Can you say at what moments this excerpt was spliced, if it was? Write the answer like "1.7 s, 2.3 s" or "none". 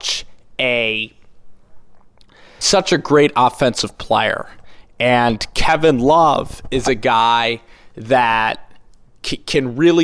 2.6 s